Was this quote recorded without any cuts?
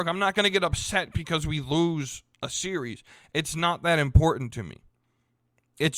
yes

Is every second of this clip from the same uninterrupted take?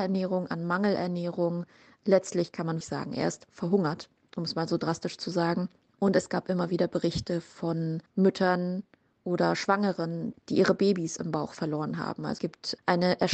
no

